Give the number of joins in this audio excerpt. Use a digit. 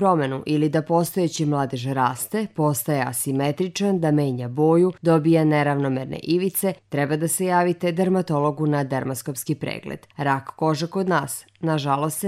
3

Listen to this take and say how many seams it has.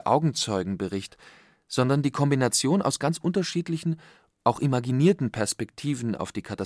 0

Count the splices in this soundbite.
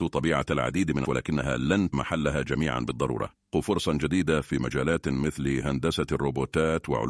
3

